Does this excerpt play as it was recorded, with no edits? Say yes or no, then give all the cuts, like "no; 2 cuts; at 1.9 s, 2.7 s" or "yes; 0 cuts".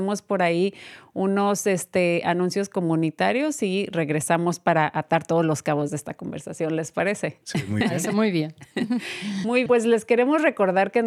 no; 1 cut; at 9.7 s